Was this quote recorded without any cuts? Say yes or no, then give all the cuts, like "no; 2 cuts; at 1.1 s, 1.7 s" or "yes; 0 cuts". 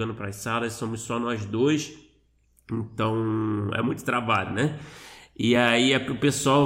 yes; 0 cuts